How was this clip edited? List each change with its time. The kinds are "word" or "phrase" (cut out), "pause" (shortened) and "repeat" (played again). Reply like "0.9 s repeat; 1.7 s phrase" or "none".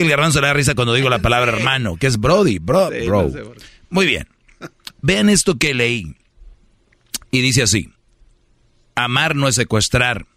3.7 s pause; 4.9 s pause